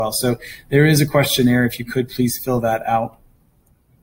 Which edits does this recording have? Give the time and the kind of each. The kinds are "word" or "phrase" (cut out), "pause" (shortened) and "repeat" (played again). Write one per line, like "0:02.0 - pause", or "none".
none